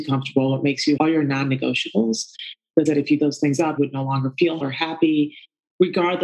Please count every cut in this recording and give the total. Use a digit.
5